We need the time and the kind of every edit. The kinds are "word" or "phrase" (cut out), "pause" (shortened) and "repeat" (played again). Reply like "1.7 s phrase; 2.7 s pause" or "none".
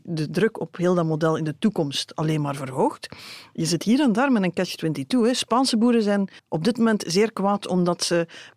6.4 s pause